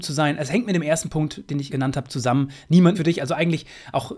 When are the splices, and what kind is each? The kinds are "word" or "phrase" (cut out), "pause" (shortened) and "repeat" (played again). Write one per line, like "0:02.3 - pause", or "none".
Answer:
0:01.7 - word
0:02.9 - phrase